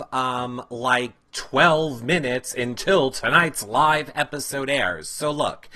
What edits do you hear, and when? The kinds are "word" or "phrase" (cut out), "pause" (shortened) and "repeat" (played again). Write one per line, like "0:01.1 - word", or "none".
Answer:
none